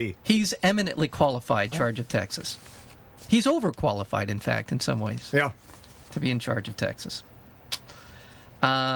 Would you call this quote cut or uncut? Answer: cut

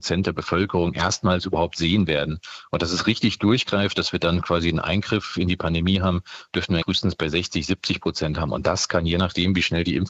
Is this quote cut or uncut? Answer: cut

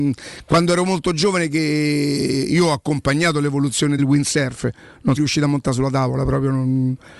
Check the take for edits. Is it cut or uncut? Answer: cut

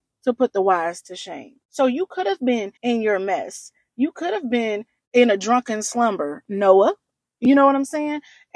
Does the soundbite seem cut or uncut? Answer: cut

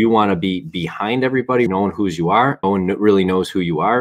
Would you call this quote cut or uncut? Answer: cut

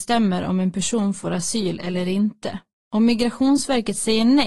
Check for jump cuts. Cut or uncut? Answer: cut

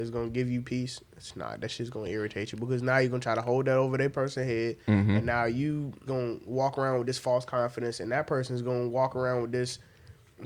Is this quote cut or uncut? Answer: cut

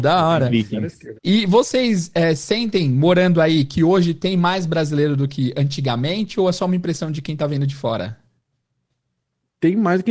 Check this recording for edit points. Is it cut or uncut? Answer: cut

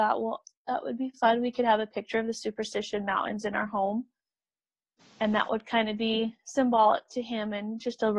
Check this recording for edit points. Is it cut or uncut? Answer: uncut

